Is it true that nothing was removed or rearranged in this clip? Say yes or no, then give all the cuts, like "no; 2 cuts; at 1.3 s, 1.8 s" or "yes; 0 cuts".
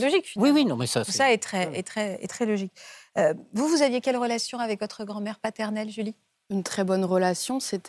no; 1 cut; at 2.3 s